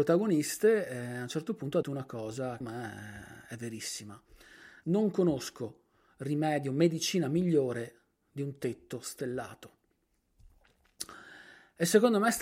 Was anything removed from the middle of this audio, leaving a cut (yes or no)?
yes